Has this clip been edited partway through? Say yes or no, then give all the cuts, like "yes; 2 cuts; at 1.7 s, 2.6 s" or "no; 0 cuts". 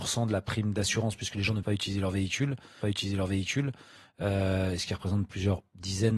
yes; 2 cuts; at 1.6 s, 2.8 s